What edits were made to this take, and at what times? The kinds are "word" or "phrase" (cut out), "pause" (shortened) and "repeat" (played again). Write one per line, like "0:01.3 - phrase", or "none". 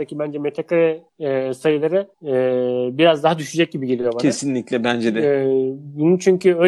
0:01.1 - pause
0:02.1 - pause

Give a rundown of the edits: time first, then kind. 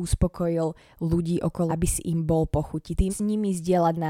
0:01.7 - word
0:03.1 - word

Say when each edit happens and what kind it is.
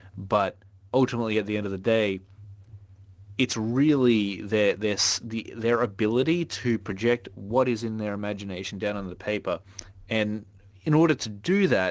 none

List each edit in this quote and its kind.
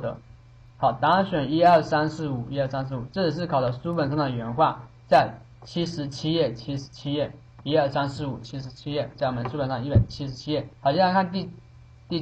0:10.7 - pause

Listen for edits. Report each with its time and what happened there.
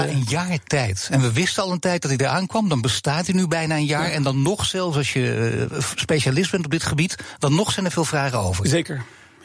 none

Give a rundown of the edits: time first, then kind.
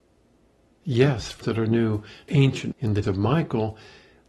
0:01.4 - word
0:02.3 - word
0:02.7 - word
0:03.0 - word

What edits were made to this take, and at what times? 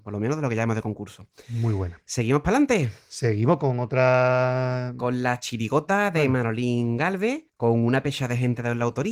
0:07.5 - pause

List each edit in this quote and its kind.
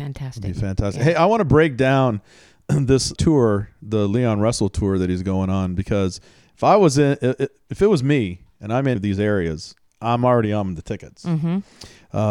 0:03.2 - word
0:09.0 - word

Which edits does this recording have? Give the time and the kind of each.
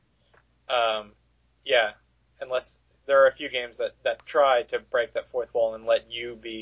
none

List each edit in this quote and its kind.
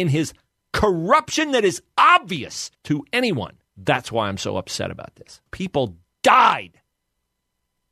0:02.7 - pause
0:03.7 - pause
0:05.5 - pause

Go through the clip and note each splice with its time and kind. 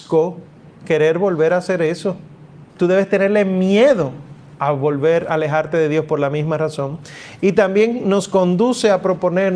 0:02.7 - pause

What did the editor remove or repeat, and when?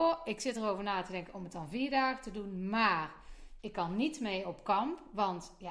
none

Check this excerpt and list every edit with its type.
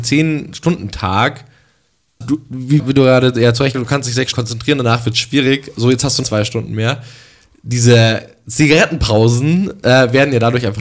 0:02.2 - word
0:02.8 - word
0:03.7 - word
0:04.3 - word
0:06.2 - word

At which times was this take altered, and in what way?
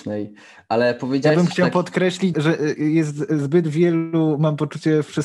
0:02.3 - word

